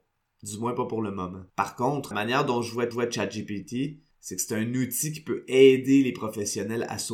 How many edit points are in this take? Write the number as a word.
three